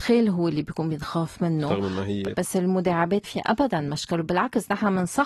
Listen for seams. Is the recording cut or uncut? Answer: cut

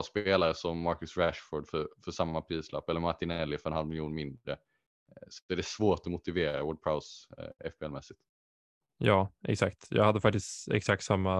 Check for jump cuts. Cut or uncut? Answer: uncut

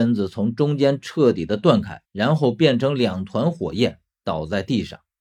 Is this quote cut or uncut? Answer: cut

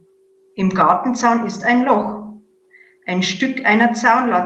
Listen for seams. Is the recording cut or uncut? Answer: uncut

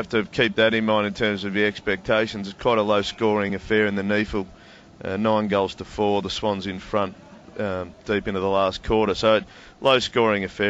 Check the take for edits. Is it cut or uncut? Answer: uncut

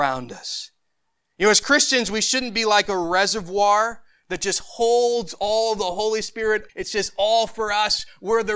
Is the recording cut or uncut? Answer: cut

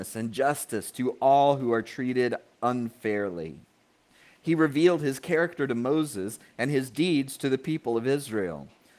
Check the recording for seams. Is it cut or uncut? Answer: uncut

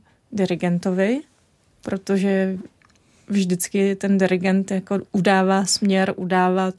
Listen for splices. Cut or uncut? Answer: uncut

